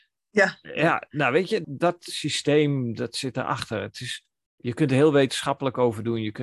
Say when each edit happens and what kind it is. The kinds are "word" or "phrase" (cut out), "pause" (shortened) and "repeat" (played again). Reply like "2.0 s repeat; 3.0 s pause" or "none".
1.6 s word